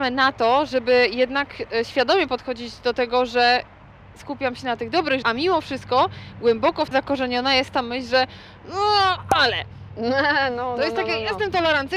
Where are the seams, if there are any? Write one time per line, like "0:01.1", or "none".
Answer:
0:05.2
0:06.9